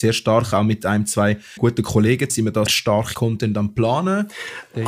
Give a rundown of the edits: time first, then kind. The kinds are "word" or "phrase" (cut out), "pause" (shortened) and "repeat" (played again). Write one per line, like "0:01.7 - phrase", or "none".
0:01.6 - word
0:02.3 - word
0:02.7 - word
0:03.1 - word